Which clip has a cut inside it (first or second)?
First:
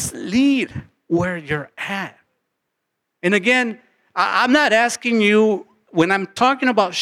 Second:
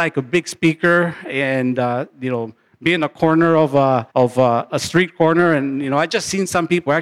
second